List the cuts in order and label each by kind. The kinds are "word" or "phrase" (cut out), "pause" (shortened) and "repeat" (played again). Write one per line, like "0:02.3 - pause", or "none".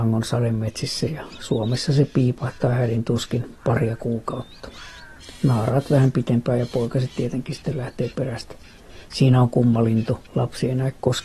0:10.3 - pause

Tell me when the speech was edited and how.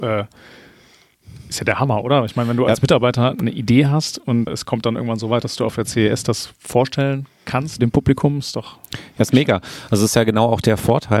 0:04.5 - word
0:07.8 - word

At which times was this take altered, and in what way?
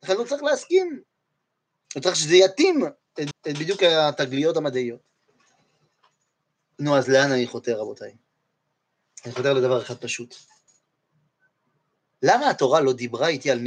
0:03.3 - repeat

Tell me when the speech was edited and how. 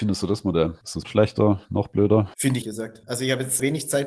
0:01.0 - word
0:02.6 - phrase

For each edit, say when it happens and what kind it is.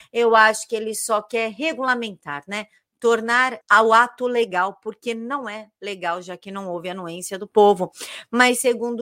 0:03.6 - pause

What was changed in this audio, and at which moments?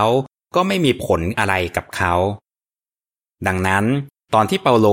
none

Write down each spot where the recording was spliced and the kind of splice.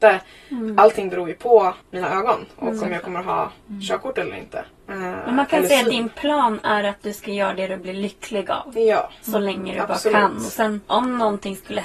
0:01.8 - pause
0:04.8 - pause
0:10.8 - pause

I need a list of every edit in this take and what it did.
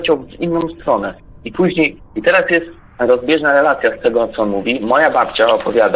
none

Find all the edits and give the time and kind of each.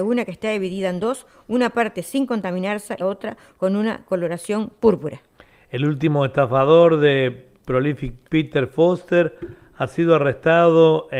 0:03.0 - word

